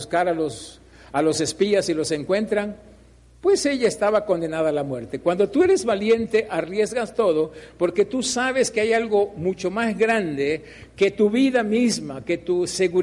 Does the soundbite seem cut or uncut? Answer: uncut